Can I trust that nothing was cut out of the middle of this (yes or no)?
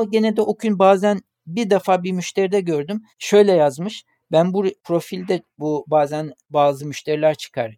yes